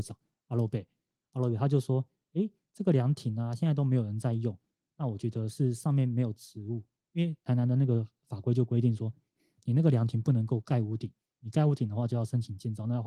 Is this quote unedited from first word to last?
yes; 0 cuts

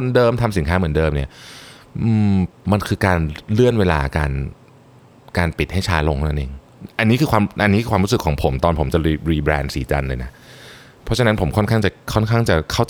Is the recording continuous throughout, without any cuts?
yes; 0 cuts

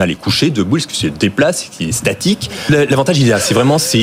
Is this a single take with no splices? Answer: yes; 0 cuts

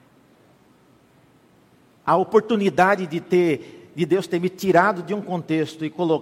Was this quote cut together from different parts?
no; 0 cuts

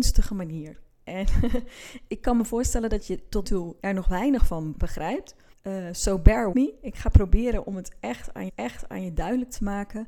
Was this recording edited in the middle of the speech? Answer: yes; 7 cuts; at 2.1 s, 3.4 s, 3.8 s, 4.7 s, 5.5 s, 6.5 s, 8.5 s

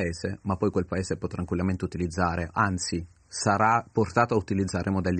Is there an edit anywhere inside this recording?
no; 0 cuts

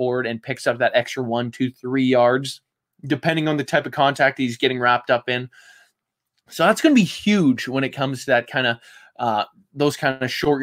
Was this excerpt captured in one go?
yes; 0 cuts

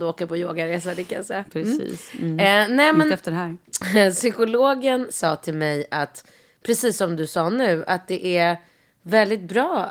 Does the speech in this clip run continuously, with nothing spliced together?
yes; 0 cuts

